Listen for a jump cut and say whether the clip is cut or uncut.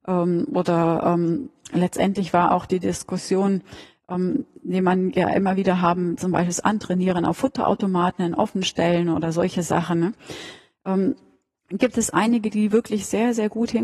uncut